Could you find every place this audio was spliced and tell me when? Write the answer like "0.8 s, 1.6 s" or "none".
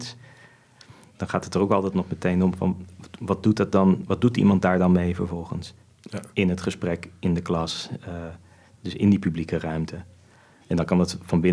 none